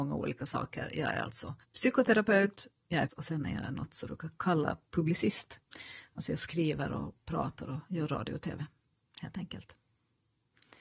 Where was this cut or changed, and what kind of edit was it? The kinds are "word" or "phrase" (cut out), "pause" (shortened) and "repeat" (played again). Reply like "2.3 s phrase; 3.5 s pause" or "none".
1.6 s pause; 3.1 s word; 4.1 s word